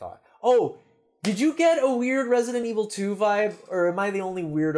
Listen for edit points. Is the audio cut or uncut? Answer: uncut